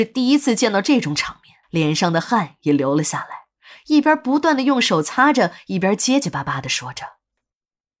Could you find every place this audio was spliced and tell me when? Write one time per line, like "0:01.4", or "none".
0:01.6